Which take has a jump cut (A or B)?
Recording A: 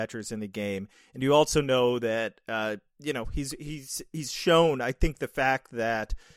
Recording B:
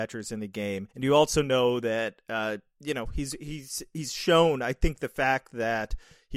B